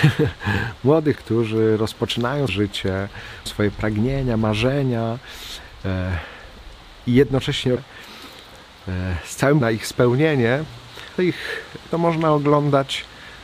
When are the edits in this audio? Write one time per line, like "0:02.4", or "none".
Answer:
0:01.2
0:02.5
0:03.5
0:07.8
0:09.6
0:11.2
0:11.9